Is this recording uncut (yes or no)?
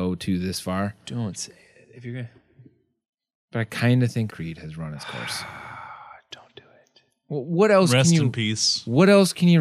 no